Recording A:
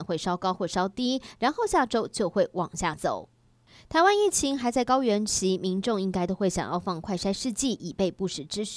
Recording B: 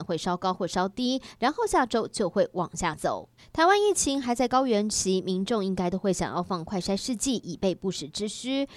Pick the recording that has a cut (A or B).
B